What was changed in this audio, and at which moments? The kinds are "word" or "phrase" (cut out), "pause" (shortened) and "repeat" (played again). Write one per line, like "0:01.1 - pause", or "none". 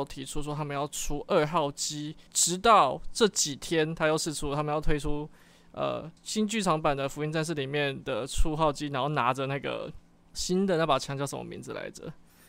0:02.3 - pause
0:06.2 - pause
0:10.3 - word